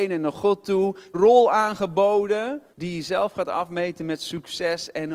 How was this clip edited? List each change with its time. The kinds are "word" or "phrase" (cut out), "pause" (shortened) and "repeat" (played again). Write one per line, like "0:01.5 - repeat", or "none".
0:01.1 - phrase
0:02.7 - pause